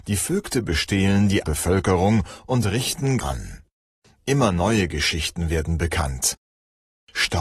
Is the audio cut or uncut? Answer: cut